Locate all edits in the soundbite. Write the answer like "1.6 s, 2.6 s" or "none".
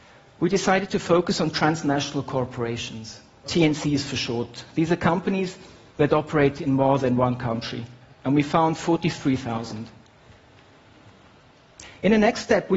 3.4 s

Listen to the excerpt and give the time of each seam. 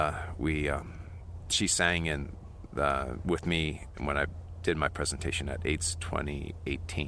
none

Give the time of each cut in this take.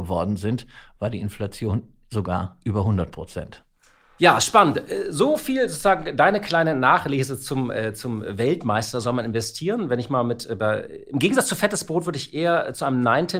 none

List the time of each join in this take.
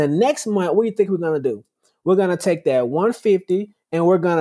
none

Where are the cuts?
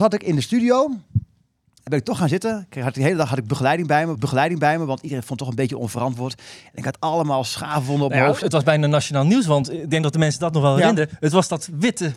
1.9 s, 4.1 s, 8.4 s

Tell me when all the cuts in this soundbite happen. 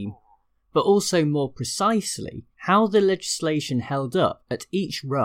2.5 s

